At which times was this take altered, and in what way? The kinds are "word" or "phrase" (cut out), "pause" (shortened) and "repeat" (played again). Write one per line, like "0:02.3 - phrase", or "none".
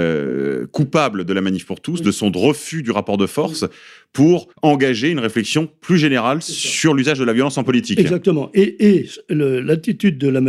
0:04.5 - pause